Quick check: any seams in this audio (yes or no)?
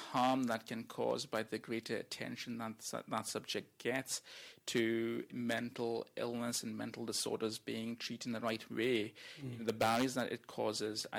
yes